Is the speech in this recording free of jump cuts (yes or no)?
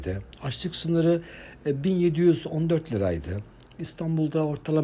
yes